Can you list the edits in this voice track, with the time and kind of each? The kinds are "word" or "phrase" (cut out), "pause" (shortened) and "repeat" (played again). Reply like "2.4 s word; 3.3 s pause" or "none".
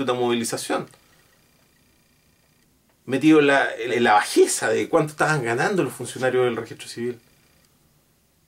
3.9 s word